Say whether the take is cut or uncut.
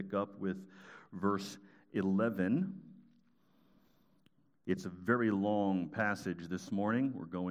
uncut